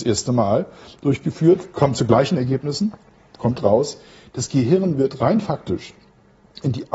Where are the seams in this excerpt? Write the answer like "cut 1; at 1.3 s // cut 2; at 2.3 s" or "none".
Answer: none